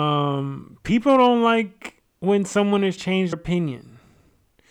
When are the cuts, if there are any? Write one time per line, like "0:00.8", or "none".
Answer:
0:02.1
0:03.0
0:03.3